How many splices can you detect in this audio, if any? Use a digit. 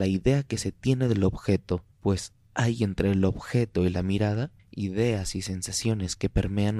2